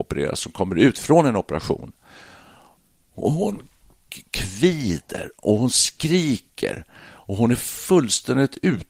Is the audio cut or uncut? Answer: uncut